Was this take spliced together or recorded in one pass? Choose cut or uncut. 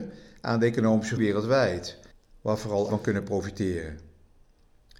cut